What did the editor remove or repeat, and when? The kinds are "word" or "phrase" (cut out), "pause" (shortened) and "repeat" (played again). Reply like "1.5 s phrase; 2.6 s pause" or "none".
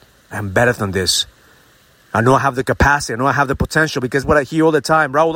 4.2 s word